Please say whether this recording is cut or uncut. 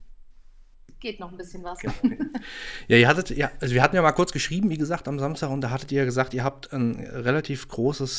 uncut